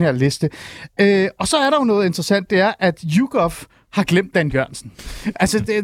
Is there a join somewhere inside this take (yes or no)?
no